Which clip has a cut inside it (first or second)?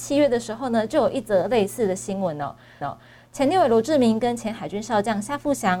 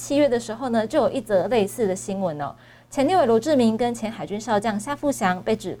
first